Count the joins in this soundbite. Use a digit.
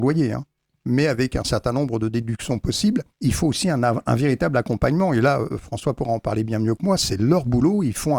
1